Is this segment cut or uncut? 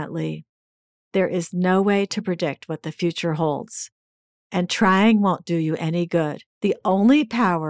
cut